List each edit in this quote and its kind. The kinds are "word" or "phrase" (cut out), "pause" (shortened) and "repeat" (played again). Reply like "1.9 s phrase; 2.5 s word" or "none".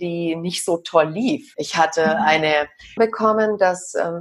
1.5 s word; 3.0 s word